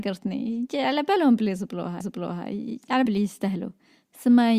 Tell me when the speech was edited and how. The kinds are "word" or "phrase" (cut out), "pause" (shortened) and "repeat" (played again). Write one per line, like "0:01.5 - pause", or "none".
0:02.0 - repeat
0:03.1 - word